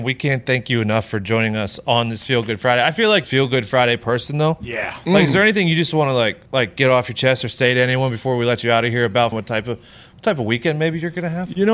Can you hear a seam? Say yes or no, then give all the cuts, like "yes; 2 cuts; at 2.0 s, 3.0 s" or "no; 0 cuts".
yes; 3 cuts; at 3.2 s, 6.5 s, 9.3 s